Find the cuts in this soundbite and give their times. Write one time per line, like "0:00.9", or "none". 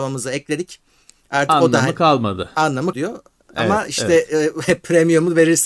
0:02.9